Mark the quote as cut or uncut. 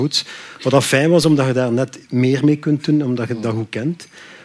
uncut